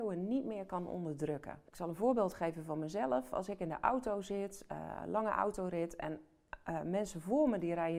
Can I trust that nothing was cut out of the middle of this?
yes; 0 cuts

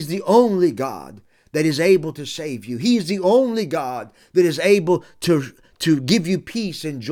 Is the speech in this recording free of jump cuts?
yes; 0 cuts

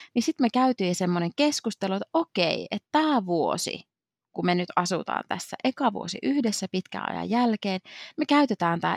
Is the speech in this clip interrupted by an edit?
no; 0 cuts

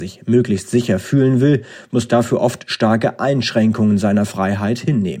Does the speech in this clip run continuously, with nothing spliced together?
yes; 0 cuts

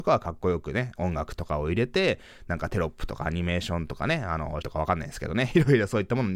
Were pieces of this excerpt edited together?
yes; 1 cut; at 4.6 s

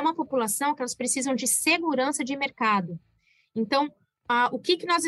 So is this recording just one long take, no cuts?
yes; 0 cuts

